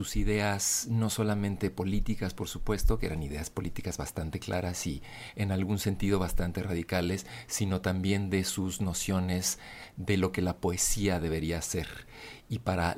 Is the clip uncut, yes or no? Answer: yes